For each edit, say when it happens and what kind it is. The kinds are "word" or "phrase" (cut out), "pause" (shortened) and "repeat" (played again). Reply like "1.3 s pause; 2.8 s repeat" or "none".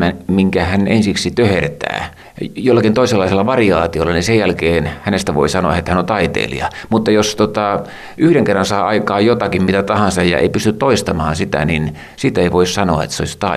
none